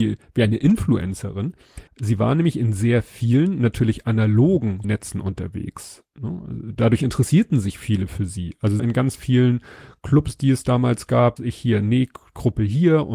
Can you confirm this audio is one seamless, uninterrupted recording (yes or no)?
no